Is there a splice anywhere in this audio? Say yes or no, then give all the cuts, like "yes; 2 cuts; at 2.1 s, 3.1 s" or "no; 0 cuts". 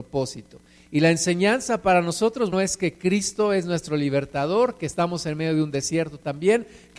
yes; 1 cut; at 2.5 s